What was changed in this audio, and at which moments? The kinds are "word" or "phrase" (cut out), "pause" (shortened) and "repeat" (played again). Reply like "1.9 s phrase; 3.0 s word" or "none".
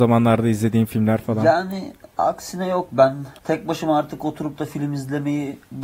3.4 s pause